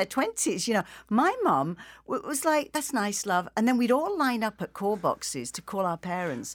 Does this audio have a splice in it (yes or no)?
no